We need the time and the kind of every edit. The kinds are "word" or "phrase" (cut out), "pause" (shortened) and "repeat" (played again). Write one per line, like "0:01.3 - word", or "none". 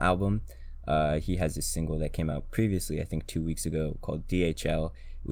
none